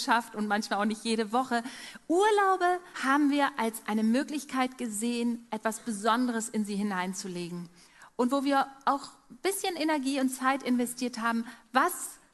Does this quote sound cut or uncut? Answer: cut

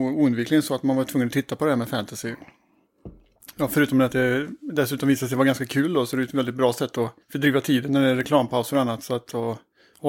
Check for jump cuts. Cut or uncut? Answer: cut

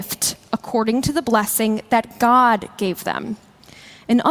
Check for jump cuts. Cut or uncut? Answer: uncut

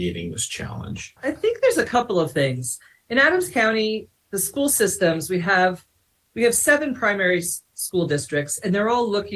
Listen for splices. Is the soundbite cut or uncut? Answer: uncut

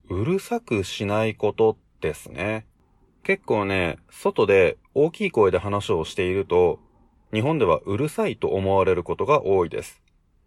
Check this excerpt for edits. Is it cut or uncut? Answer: uncut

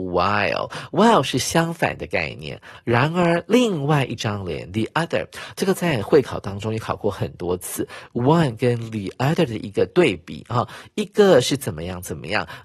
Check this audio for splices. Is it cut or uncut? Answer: uncut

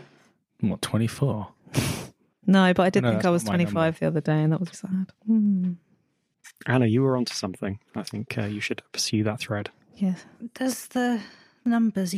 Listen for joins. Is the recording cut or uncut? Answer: cut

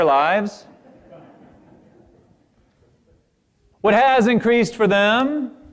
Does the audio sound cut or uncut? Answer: uncut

